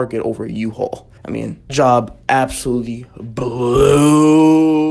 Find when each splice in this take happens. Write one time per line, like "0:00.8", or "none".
0:01.2
0:01.7